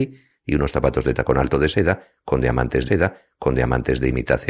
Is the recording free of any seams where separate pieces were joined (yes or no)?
no